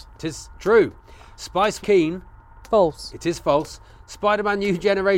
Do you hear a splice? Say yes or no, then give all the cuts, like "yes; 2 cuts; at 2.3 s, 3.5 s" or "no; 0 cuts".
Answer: yes; 1 cut; at 1.8 s